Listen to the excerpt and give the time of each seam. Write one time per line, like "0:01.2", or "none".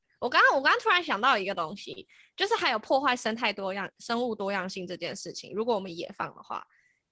none